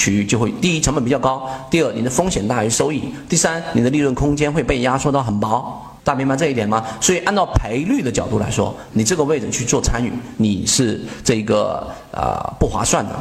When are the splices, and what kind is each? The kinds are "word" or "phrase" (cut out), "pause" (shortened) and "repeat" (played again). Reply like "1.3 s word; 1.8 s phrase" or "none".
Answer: 6.0 s pause